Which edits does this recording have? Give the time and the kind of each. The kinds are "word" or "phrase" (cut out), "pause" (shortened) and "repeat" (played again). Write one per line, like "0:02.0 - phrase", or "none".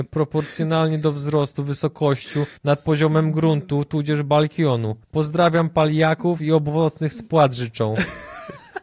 0:02.6 - pause
0:05.0 - pause